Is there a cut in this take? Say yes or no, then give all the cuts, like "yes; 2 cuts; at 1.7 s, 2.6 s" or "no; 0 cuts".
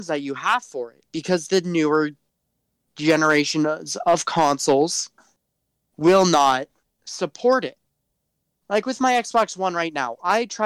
no; 0 cuts